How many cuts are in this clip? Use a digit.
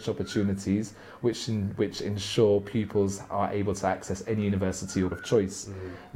1